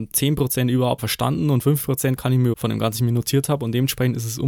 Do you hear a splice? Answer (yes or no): yes